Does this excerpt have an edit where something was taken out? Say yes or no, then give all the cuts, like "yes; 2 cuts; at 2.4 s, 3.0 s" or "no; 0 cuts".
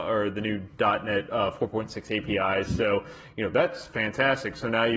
no; 0 cuts